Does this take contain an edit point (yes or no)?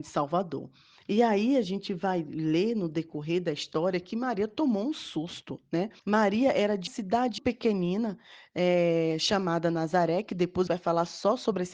yes